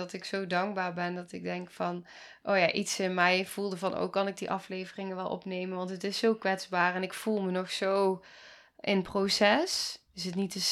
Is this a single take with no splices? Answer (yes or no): yes